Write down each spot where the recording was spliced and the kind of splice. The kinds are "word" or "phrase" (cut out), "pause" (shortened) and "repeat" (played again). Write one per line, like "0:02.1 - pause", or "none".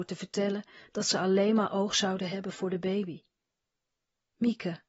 none